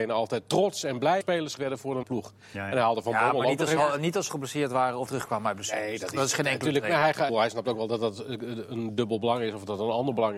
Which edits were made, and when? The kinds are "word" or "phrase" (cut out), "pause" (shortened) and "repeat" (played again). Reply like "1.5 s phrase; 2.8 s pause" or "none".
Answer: 1.2 s word; 1.6 s word; 2.0 s word; 4.3 s word; 5.1 s word; 7.3 s word